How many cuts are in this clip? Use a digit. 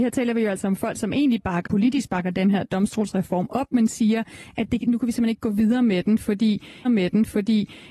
2